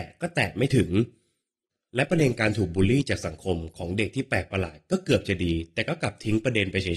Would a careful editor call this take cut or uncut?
uncut